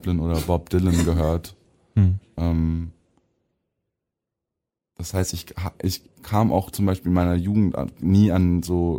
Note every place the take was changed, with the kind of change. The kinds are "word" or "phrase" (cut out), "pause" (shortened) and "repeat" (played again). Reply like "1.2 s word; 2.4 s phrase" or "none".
none